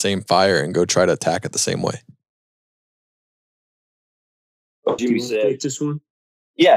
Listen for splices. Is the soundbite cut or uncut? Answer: cut